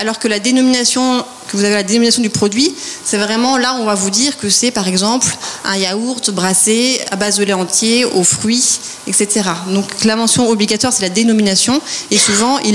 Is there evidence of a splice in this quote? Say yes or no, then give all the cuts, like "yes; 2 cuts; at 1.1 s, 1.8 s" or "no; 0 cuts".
no; 0 cuts